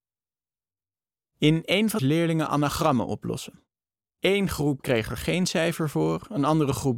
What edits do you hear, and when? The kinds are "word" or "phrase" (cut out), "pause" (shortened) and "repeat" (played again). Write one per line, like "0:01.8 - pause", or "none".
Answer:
0:02.0 - phrase
0:03.8 - pause